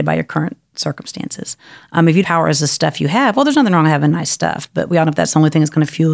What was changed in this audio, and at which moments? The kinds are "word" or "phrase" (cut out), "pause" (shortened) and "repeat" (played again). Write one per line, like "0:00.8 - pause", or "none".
0:02.2 - word